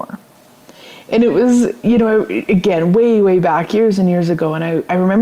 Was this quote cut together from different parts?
no; 0 cuts

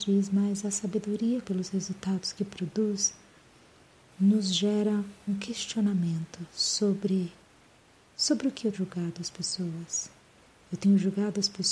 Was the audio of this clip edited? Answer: yes; 3 cuts; at 1.4 s, 5.3 s, 8.7 s

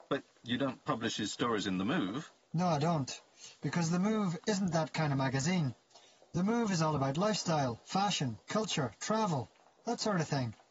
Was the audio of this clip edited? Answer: no; 0 cuts

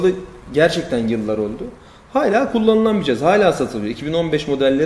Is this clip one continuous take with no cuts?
yes; 0 cuts

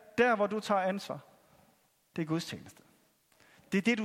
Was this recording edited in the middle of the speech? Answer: no; 0 cuts

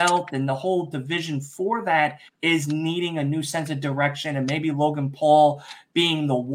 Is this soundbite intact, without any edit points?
no; 1 cut; at 2.3 s

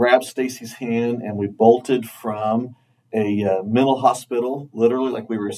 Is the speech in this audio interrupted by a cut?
no; 0 cuts

